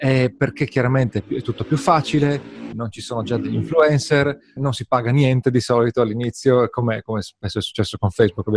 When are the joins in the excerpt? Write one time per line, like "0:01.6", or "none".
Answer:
0:02.7
0:04.6